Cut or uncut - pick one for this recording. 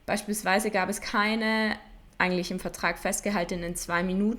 uncut